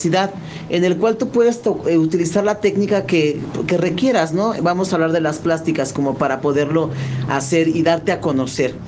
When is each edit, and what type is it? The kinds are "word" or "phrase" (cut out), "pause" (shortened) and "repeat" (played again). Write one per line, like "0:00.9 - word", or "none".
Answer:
none